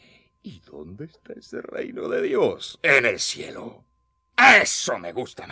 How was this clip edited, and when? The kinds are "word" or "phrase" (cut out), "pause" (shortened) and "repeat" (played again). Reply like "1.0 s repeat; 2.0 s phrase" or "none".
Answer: none